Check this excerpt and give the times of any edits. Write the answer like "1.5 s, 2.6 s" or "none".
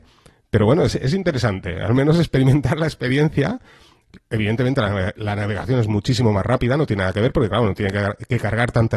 none